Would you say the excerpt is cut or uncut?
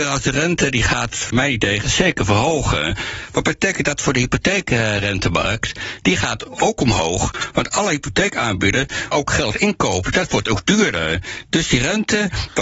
cut